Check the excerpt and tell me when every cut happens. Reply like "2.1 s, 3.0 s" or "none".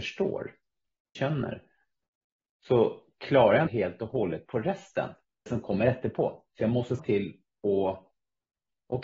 1.2 s, 3.7 s, 5.5 s, 6.5 s, 7.0 s

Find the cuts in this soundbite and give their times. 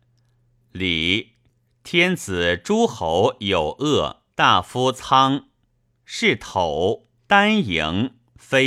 4.3 s, 7.2 s

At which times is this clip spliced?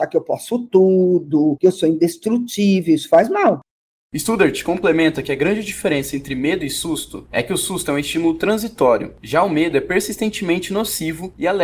none

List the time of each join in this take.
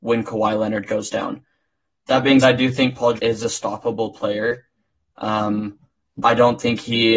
2.4 s, 3.2 s

